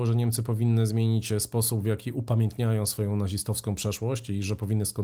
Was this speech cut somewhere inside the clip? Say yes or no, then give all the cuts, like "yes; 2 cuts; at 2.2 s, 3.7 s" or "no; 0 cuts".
no; 0 cuts